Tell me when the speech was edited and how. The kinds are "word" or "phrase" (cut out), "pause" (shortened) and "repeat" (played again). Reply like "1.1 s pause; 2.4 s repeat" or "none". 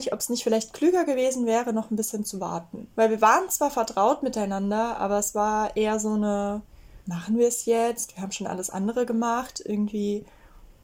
2.9 s pause; 7.0 s pause